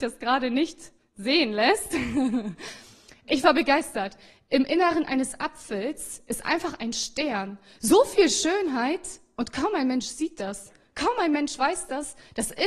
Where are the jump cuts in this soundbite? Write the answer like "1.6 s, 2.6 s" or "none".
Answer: none